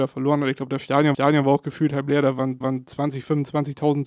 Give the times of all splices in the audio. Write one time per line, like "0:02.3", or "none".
0:01.1
0:02.6